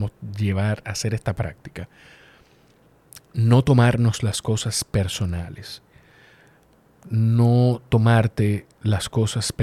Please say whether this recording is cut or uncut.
uncut